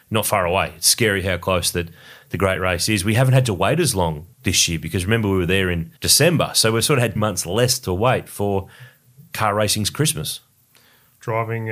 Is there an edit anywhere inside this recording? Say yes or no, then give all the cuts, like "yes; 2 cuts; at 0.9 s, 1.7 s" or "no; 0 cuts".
yes; 3 cuts; at 4.3 s, 6.0 s, 7.2 s